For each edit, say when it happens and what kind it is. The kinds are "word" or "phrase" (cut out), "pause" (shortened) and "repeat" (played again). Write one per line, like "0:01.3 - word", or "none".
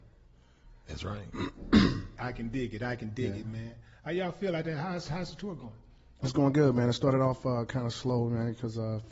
0:02.2 - word